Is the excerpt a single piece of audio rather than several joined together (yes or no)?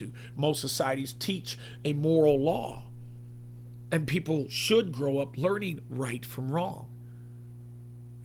yes